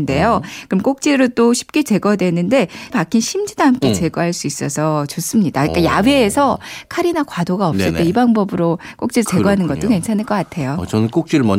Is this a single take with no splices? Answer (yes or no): no